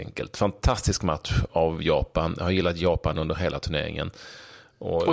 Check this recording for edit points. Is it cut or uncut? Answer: uncut